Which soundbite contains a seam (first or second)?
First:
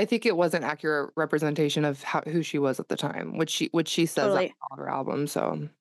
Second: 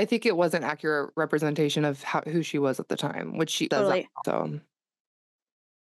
second